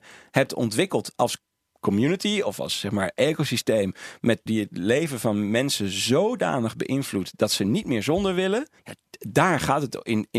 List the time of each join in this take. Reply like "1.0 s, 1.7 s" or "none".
4.5 s, 8.8 s